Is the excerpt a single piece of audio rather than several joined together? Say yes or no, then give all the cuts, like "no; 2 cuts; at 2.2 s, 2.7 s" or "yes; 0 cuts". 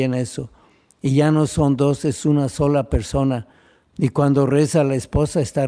yes; 0 cuts